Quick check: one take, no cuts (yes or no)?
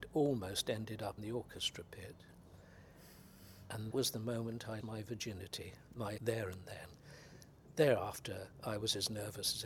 no